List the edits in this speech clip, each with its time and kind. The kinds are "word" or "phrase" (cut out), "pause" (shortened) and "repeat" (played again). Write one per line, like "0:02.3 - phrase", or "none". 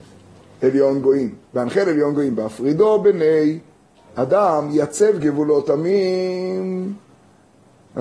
none